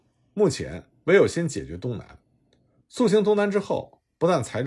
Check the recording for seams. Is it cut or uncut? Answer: uncut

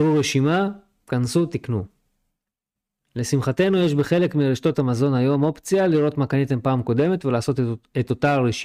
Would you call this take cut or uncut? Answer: uncut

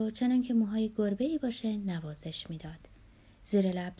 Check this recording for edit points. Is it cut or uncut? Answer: uncut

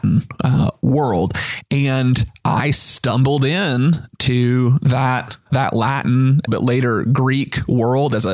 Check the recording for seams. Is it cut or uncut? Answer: cut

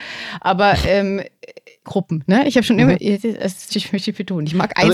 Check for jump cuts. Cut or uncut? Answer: cut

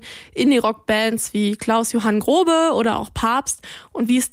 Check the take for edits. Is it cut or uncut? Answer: uncut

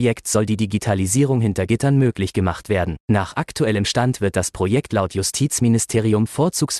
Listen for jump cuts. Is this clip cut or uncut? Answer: cut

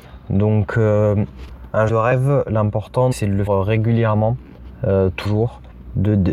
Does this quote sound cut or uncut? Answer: cut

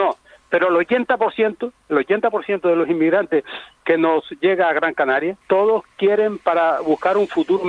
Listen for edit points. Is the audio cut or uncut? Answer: cut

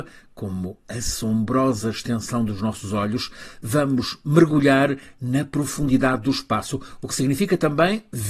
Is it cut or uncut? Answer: uncut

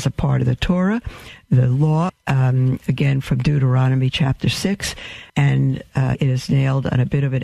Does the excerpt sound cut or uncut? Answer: cut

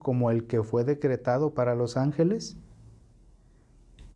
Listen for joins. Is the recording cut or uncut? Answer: uncut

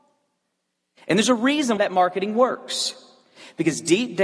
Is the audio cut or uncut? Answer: cut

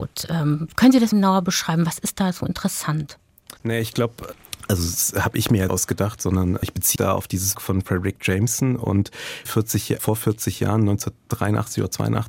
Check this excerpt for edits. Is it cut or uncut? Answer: cut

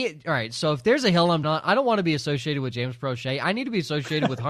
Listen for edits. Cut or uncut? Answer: cut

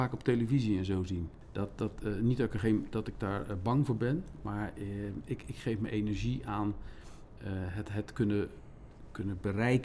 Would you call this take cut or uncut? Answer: uncut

